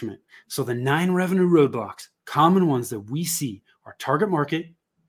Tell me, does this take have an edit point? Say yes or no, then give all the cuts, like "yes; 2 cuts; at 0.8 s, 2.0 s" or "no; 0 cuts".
no; 0 cuts